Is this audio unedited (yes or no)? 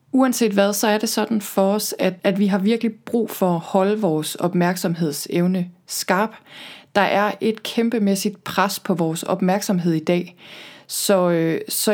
no